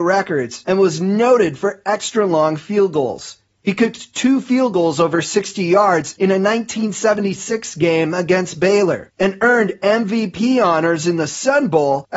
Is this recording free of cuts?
yes; 0 cuts

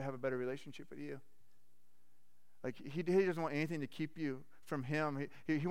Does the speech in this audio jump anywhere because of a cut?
no; 0 cuts

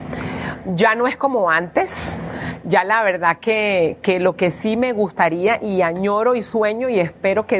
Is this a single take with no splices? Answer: yes; 0 cuts

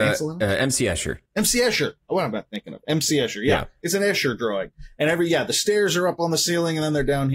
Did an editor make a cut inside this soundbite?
yes; 1 cut; at 1.3 s

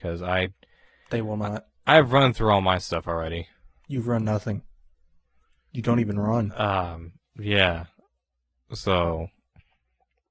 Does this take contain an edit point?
no; 0 cuts

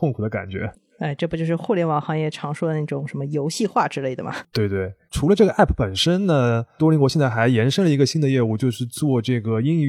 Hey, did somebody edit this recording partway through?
no; 0 cuts

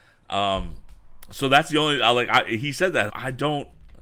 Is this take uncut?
no; 1 cut; at 3.1 s

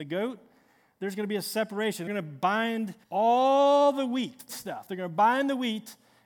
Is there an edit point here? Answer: yes; 3 cuts; at 2.1 s, 3.0 s, 4.5 s

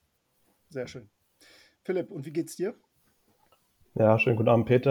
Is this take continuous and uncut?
yes; 0 cuts

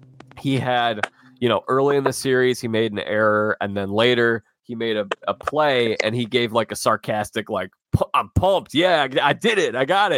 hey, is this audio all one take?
yes; 0 cuts

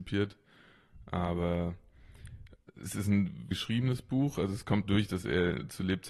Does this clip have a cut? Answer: yes; 2 cuts; at 3.5 s, 4.8 s

